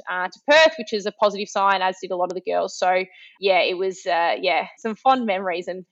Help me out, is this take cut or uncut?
uncut